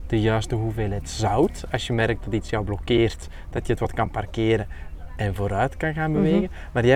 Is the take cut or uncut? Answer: uncut